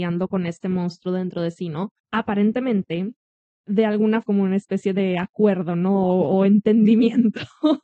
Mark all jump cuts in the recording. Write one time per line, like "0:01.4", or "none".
0:02.0
0:04.2

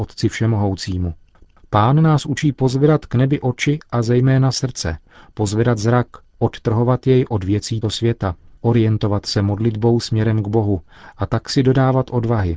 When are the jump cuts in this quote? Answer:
0:07.8

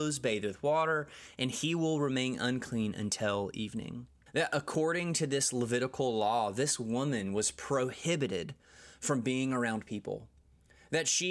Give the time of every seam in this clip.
0:04.3

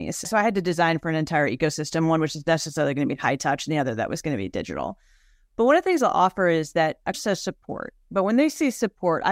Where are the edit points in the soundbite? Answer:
0:07.1

